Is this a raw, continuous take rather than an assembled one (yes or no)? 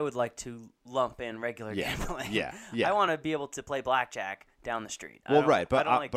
yes